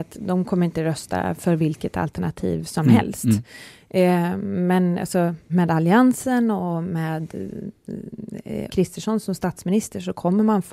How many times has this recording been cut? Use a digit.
2